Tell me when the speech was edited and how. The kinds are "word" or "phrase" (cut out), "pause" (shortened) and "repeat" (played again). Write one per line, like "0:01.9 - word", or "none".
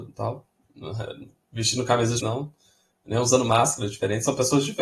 0:02.2 - word